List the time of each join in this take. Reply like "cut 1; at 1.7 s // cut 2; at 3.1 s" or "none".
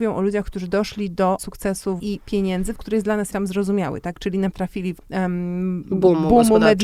cut 1; at 1.4 s // cut 2; at 2.0 s // cut 3; at 2.7 s // cut 4; at 3.3 s // cut 5; at 4.5 s // cut 6; at 5.0 s